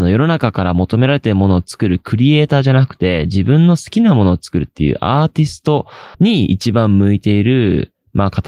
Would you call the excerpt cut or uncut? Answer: cut